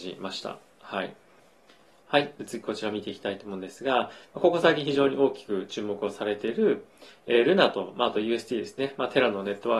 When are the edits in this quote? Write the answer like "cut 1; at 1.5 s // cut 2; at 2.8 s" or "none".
none

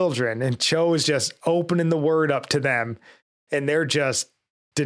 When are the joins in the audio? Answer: none

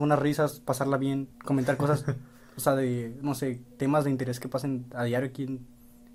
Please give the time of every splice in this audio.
cut 1; at 1.3 s

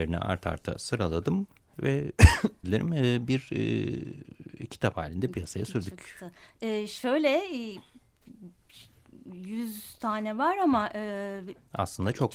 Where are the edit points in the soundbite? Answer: cut 1; at 2.6 s

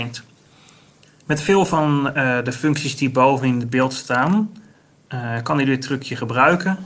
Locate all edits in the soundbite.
none

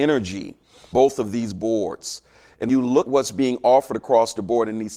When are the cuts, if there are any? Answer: cut 1; at 0.9 s // cut 2; at 2.7 s // cut 3; at 3.1 s

